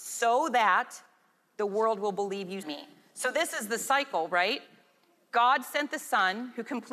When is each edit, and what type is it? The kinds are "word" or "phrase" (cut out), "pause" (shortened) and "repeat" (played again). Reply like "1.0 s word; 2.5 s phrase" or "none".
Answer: 2.6 s word